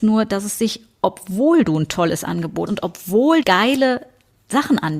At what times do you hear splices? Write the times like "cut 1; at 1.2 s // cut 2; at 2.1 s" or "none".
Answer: cut 1; at 2.7 s // cut 2; at 3.4 s